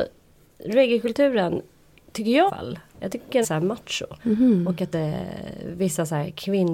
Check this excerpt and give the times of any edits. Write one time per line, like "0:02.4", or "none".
0:02.5
0:03.4
0:04.2
0:04.9